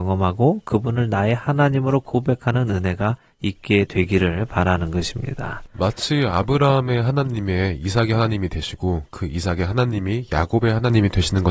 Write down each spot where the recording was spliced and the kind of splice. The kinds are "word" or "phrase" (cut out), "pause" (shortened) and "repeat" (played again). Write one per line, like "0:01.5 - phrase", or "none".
none